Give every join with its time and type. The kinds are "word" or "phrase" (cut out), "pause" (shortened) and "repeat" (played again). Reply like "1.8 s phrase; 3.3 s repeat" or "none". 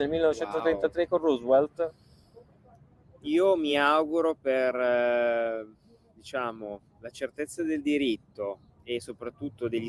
none